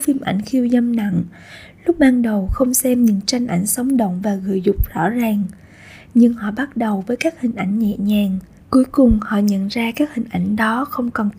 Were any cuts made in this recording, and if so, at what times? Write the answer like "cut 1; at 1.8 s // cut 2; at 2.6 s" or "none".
cut 1; at 8.6 s

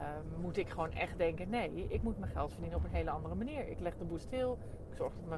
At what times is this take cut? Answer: cut 1; at 4.2 s

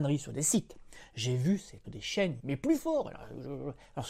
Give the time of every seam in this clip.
cut 1; at 1.8 s // cut 2; at 2.4 s

